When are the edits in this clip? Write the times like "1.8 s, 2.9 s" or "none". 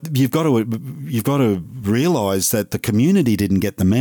none